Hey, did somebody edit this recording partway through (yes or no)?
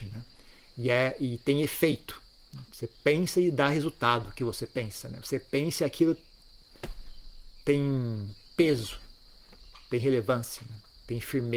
yes